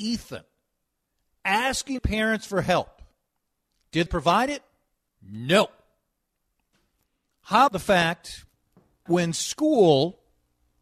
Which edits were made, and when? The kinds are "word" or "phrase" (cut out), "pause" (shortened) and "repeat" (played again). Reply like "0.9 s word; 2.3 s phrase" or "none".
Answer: 2.0 s word; 4.1 s word; 7.7 s word; 9.1 s word